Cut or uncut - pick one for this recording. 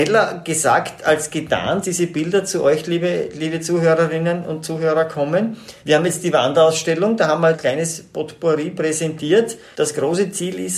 cut